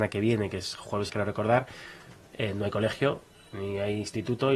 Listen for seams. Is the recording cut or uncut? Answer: cut